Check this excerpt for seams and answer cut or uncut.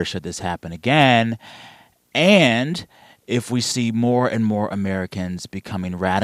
uncut